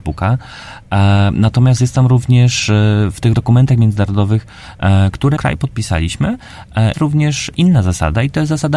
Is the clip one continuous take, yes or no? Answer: no